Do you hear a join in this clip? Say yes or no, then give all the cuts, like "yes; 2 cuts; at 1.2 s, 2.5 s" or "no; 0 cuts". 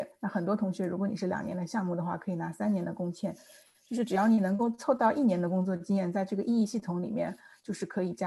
no; 0 cuts